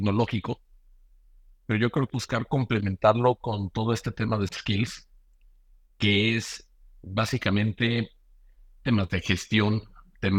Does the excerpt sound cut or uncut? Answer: cut